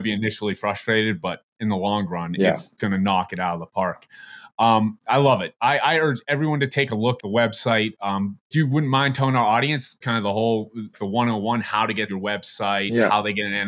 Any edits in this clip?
yes; 6 cuts; at 2.8 s, 7.2 s, 8.5 s, 10.0 s, 10.9 s, 12.1 s

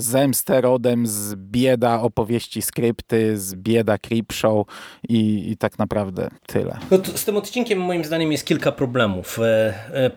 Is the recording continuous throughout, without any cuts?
no; 1 cut; at 6.4 s

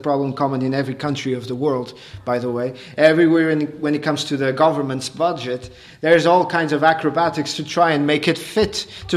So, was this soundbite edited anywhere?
no; 0 cuts

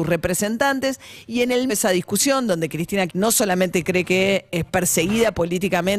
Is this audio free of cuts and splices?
no; 2 cuts; at 1.7 s, 3.1 s

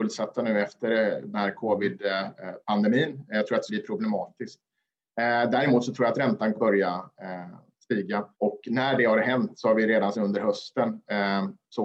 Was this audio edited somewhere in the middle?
yes; 4 cuts; at 3.7 s, 6.5 s, 8.3 s, 10.1 s

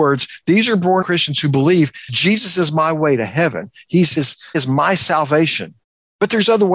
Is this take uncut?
no; 5 cuts; at 1.0 s, 2.1 s, 4.2 s, 4.5 s, 5.8 s

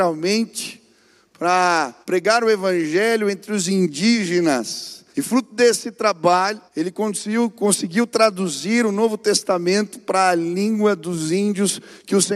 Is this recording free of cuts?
no; 3 cuts; at 2.0 s, 5.1 s, 6.7 s

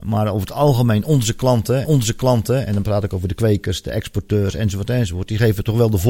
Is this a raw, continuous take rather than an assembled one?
no; 1 cut; at 1.8 s

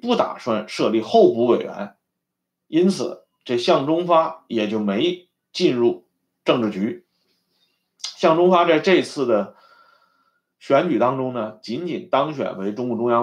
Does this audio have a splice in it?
yes; 1 cut; at 2.2 s

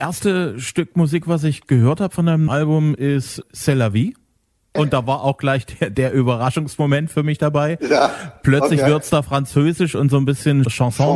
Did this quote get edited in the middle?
no; 0 cuts

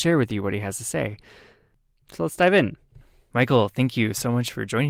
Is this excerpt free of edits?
yes; 0 cuts

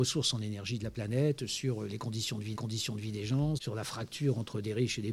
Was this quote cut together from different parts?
yes; 2 cuts; at 2.5 s, 3.6 s

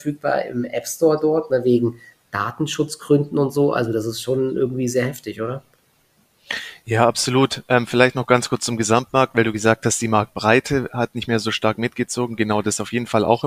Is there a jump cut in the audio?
no; 0 cuts

